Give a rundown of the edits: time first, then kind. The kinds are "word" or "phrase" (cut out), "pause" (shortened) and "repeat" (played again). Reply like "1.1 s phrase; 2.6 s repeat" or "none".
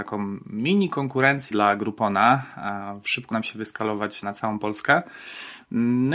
1.5 s word; 3.3 s word; 4.2 s word